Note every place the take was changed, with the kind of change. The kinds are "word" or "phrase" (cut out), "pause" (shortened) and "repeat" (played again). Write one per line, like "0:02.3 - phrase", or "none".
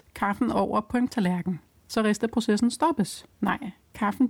0:01.1 - word
0:03.3 - pause